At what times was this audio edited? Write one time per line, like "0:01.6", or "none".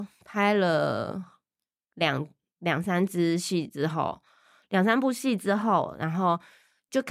none